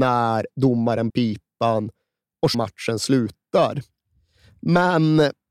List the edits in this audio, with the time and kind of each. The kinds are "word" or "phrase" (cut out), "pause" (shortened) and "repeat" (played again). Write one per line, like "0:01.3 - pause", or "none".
0:01.1 - phrase
0:02.5 - word

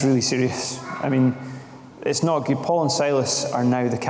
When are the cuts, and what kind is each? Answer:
none

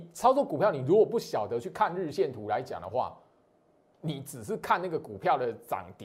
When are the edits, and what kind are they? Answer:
0:03.9 - word

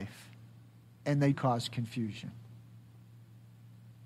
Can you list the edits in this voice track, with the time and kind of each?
0:01.3 - word

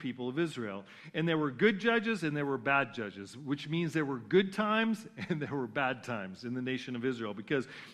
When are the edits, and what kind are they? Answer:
none

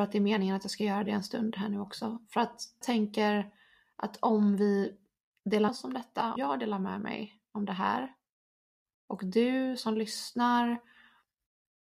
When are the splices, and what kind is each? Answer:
0:02.8 - word
0:05.7 - word
0:06.4 - word

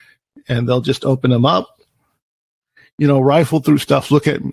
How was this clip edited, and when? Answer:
none

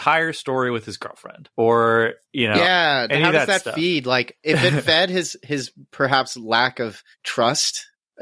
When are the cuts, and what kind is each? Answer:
0:01.5 - pause
0:07.1 - pause

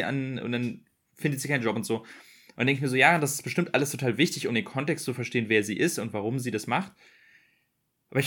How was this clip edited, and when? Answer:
none

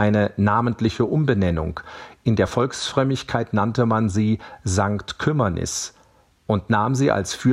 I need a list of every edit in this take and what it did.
none

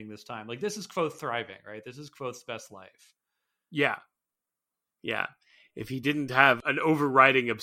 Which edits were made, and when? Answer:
none

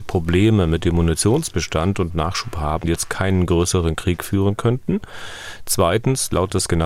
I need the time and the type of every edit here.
0:02.8 - word

